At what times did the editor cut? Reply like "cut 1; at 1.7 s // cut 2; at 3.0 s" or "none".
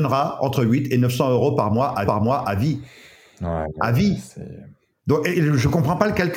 cut 1; at 2.0 s // cut 2; at 4.9 s // cut 3; at 5.3 s